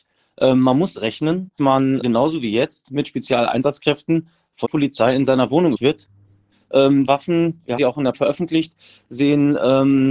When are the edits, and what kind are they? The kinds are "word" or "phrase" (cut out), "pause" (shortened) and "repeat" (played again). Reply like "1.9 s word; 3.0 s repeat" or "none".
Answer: 0.9 s word; 1.6 s word; 2.0 s word; 4.6 s word; 5.7 s word; 7.1 s word; 7.8 s word; 8.1 s word